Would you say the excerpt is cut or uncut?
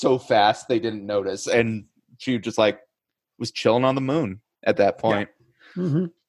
uncut